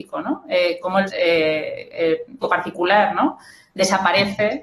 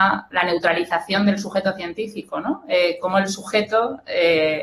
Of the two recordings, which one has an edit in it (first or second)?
first